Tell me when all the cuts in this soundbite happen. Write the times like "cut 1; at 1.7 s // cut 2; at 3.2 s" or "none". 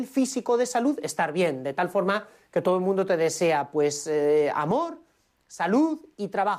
none